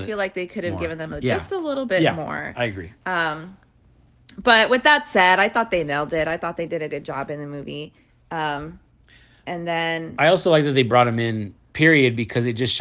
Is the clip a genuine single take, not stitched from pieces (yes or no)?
yes